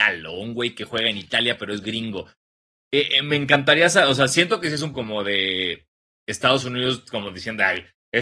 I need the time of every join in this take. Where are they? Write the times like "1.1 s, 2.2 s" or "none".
4.9 s